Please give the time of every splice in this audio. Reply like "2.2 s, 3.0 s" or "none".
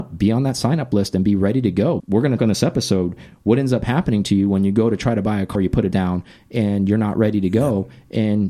2.0 s, 2.4 s, 5.5 s, 5.9 s